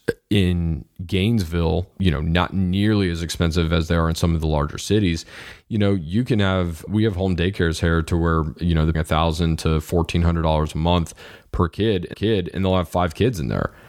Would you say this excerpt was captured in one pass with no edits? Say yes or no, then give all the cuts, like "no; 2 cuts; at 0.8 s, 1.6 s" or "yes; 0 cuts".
no; 4 cuts; at 1.9 s, 6.9 s, 8.9 s, 12.1 s